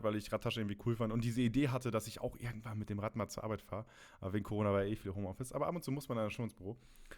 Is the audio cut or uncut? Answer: uncut